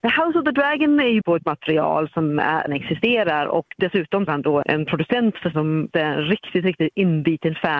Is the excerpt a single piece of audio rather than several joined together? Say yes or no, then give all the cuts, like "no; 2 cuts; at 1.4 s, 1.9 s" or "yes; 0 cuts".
no; 6 cuts; at 1.2 s, 2.7 s, 4.3 s, 4.6 s, 5.5 s, 5.9 s